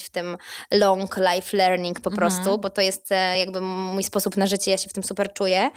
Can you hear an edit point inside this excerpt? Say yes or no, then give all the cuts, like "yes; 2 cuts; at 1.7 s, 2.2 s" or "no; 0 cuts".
no; 0 cuts